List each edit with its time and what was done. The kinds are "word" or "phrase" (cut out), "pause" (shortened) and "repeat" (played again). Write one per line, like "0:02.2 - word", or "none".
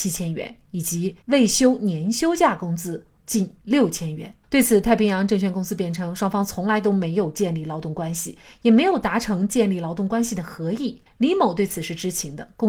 0:01.2 - pause
0:03.2 - pause
0:04.4 - pause

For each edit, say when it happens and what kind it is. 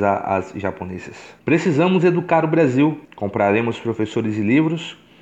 0:01.4 - pause
0:03.0 - pause

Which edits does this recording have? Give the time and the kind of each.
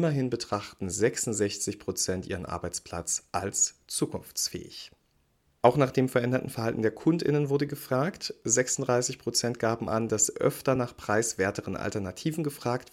none

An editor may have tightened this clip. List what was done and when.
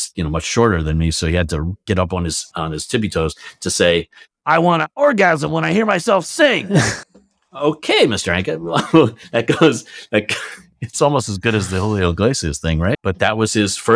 0:04.2 - pause

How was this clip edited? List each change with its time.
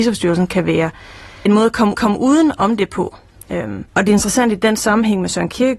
0:01.5 - word
0:01.9 - repeat
0:03.9 - pause

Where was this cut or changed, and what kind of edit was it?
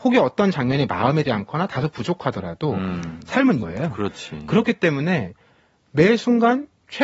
0:01.2 - word
0:03.6 - word

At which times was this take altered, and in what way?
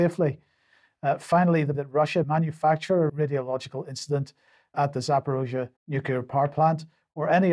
0:01.7 - word
0:02.2 - word
0:03.1 - word
0:04.7 - word
0:05.8 - pause

